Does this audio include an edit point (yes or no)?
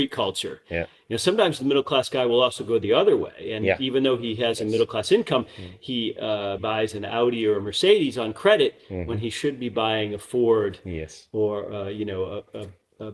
yes